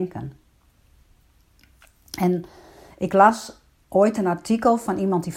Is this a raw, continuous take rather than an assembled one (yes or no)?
yes